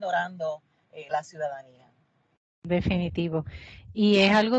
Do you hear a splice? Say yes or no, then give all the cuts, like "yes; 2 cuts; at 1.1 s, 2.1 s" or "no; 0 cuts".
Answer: yes; 1 cut; at 1.1 s